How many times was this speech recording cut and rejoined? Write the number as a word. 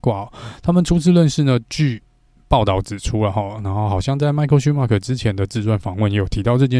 zero